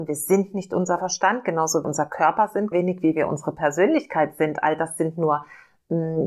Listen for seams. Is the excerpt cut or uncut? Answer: cut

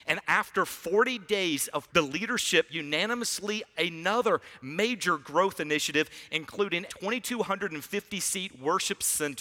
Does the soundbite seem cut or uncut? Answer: cut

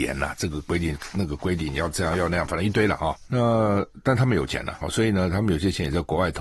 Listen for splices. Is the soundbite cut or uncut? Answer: cut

